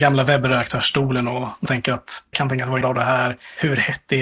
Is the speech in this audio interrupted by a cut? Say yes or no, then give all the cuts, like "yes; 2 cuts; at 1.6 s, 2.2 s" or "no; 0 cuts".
yes; 3 cuts; at 1.7 s, 2.3 s, 2.8 s